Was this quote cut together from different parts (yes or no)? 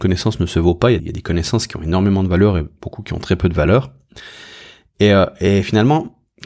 yes